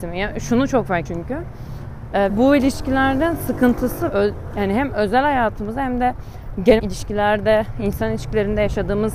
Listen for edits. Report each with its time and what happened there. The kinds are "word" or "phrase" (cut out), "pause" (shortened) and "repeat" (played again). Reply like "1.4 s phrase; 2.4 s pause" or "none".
1.1 s word; 2.3 s word; 4.1 s word; 6.8 s word